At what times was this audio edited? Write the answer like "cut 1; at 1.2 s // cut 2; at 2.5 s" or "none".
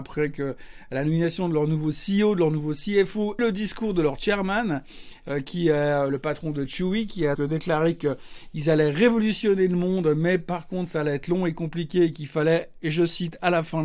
cut 1; at 3.4 s // cut 2; at 7.3 s